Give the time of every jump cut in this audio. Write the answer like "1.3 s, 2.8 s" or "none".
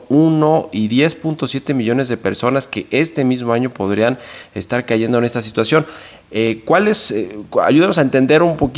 none